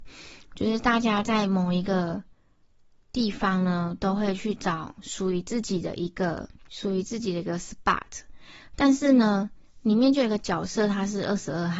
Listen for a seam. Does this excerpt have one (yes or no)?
no